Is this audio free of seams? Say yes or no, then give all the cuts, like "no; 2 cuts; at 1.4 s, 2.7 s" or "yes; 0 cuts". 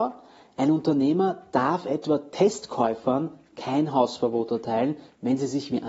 yes; 0 cuts